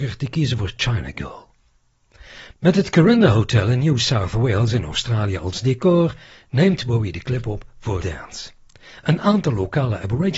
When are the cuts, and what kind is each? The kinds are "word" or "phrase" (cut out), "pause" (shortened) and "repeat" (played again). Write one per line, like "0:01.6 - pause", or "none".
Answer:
0:08.0 - word

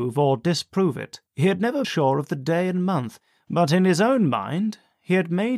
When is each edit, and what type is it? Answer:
0:01.3 - pause
0:01.8 - word

